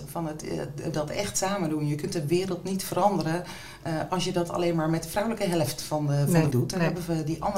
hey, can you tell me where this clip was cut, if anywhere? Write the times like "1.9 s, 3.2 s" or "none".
0.9 s, 6.5 s